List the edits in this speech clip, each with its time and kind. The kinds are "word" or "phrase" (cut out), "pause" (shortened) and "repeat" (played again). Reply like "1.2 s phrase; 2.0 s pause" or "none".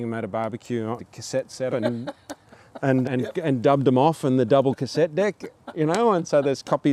1.0 s word; 1.7 s word; 3.0 s word